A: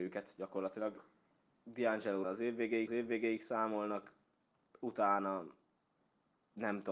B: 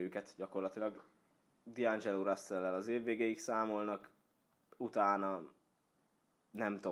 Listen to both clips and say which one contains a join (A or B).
A